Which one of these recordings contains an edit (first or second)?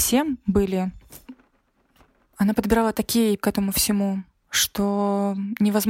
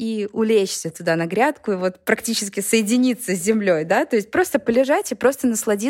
first